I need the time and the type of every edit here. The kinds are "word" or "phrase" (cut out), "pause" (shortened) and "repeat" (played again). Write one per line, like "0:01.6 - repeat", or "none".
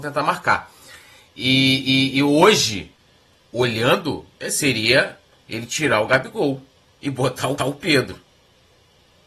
0:07.6 - repeat